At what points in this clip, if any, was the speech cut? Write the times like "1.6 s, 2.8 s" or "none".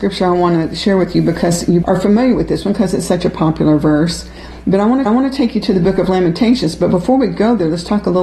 1.8 s, 5.1 s